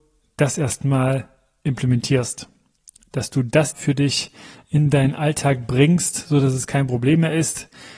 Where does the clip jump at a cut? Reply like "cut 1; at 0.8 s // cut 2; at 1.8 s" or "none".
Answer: cut 1; at 3.7 s